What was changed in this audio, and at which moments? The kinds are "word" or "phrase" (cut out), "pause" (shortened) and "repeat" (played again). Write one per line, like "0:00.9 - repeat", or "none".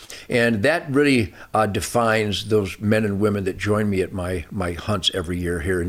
none